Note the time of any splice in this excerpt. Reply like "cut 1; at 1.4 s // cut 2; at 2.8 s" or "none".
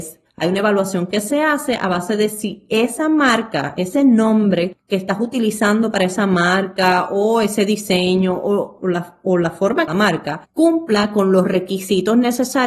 cut 1; at 8.8 s // cut 2; at 9.9 s